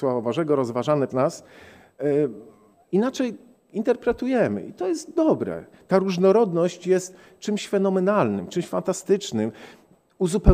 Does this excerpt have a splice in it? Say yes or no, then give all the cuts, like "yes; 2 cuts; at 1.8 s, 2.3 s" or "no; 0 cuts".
yes; 2 cuts; at 1.1 s, 5.2 s